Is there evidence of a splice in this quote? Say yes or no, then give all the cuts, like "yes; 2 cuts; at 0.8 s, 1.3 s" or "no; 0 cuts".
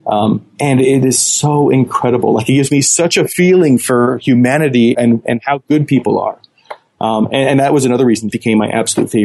yes; 2 cuts; at 4.9 s, 8.3 s